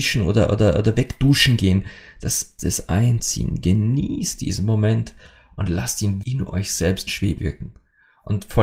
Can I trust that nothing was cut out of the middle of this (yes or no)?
no